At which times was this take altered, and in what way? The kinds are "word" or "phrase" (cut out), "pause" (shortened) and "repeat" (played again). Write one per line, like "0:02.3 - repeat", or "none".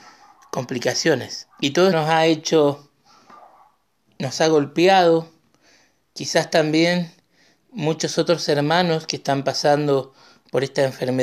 0:01.5 - pause
0:01.9 - word